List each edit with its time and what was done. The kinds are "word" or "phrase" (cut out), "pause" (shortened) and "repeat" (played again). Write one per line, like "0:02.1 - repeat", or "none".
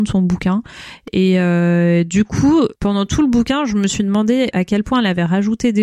0:02.7 - pause
0:04.5 - word